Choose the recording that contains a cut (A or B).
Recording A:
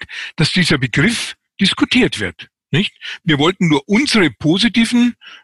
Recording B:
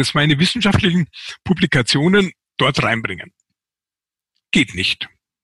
A